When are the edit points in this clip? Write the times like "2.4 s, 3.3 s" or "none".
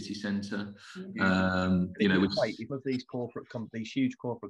2.7 s